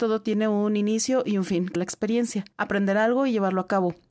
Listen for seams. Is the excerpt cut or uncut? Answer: cut